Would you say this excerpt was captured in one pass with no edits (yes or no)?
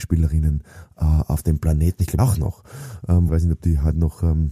no